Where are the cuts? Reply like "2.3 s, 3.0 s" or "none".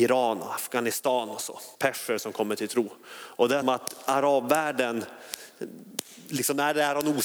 1.7 s, 3.6 s